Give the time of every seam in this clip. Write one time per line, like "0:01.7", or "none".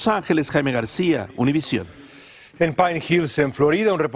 none